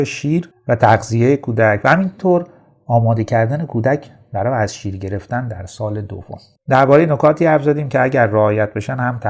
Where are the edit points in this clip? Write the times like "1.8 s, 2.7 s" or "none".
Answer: none